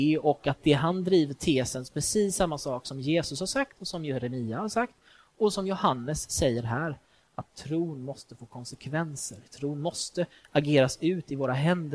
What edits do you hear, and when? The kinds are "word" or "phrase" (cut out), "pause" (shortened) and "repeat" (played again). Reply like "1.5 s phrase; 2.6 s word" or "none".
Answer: none